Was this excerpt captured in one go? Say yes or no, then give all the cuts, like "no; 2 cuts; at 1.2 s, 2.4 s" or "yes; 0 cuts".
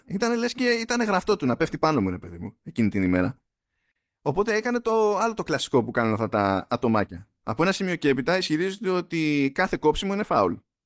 yes; 0 cuts